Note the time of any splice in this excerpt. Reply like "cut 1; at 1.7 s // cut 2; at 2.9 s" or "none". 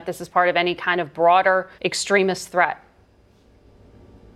cut 1; at 1.8 s